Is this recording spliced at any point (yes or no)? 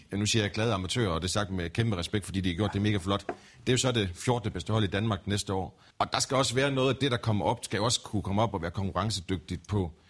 yes